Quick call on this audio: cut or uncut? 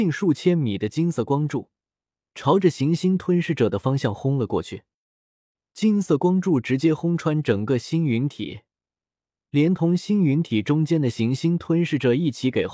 uncut